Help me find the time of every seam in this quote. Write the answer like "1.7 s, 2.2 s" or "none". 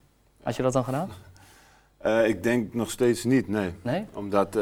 none